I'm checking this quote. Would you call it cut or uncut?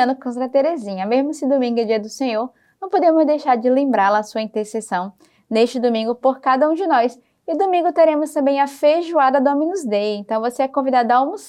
uncut